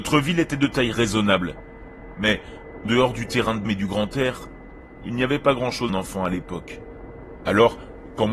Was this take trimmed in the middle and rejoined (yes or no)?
yes